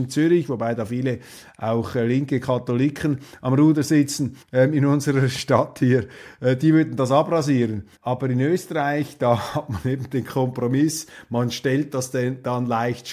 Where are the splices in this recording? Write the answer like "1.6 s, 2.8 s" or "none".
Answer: 4.4 s, 8.0 s